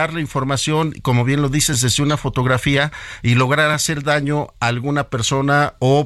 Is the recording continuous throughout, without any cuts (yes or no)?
yes